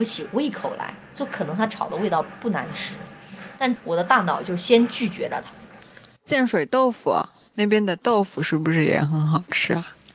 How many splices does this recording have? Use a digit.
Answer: 0